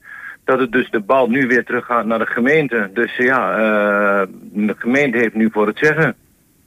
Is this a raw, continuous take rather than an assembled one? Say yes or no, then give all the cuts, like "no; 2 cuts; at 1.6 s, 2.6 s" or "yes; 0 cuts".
no; 1 cut; at 0.9 s